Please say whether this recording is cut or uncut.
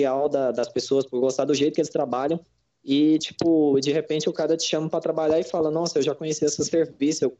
uncut